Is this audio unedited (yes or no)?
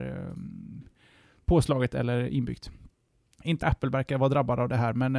no